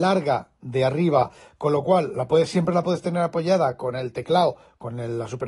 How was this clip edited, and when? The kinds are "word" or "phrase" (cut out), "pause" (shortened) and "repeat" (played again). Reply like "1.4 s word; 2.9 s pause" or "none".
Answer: none